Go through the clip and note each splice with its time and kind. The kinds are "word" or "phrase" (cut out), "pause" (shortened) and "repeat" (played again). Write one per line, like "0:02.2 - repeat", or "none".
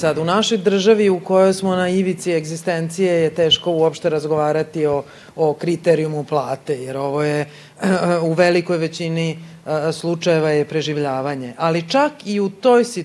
none